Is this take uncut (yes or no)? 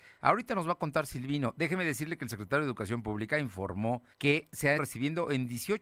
no